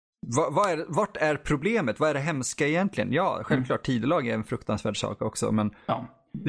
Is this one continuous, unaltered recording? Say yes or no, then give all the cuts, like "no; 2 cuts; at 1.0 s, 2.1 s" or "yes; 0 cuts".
yes; 0 cuts